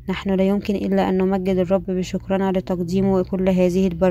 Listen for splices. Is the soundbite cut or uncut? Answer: uncut